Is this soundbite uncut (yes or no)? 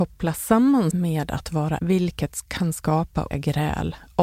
no